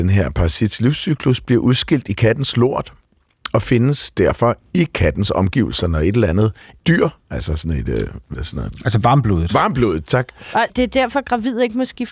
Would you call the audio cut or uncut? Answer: cut